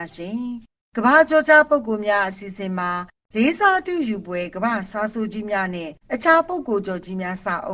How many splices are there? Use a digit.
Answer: 1